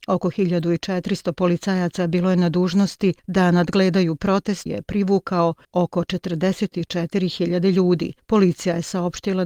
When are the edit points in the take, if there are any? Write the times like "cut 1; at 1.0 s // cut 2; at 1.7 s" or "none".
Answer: cut 1; at 4.7 s

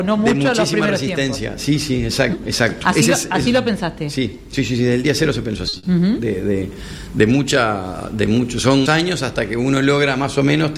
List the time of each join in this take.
cut 1; at 2.3 s // cut 2; at 8.9 s

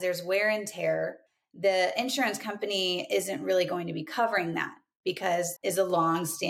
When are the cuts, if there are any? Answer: cut 1; at 5.6 s

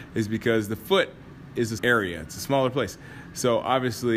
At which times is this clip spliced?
cut 1; at 1.8 s

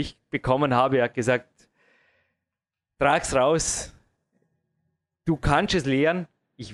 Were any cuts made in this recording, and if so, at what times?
none

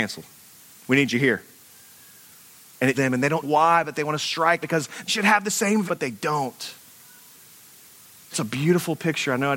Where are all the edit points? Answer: cut 1; at 2.9 s // cut 2; at 3.4 s // cut 3; at 4.6 s // cut 4; at 5.1 s // cut 5; at 5.9 s // cut 6; at 8.3 s

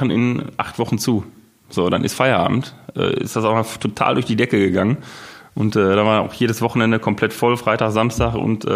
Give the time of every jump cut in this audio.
none

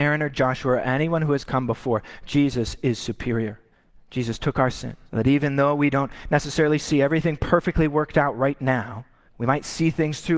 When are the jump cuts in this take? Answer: cut 1; at 3.7 s // cut 2; at 5.1 s // cut 3; at 9.3 s

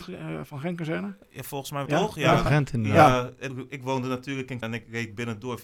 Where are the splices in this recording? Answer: cut 1; at 1.9 s // cut 2; at 2.5 s // cut 3; at 3.5 s // cut 4; at 4.6 s

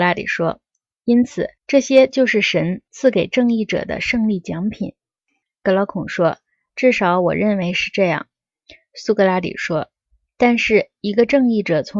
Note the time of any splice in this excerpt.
cut 1; at 1.6 s

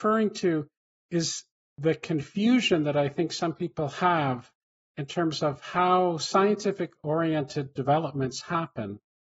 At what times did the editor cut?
none

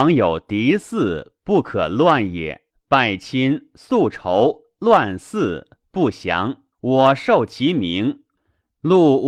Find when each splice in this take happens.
cut 1; at 2.7 s // cut 2; at 6.7 s

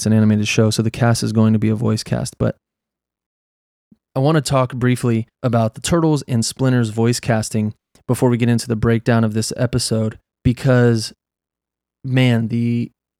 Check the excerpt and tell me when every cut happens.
cut 1; at 5.3 s // cut 2; at 10.3 s

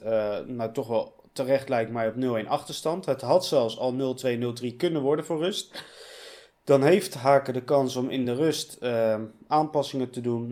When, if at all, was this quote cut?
none

